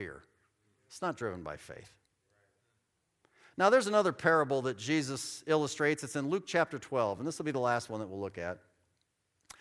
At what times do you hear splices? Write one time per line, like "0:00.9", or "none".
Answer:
none